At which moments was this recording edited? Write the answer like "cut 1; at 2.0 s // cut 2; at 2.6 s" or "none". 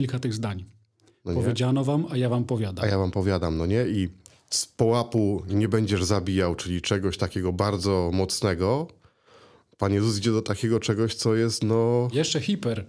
none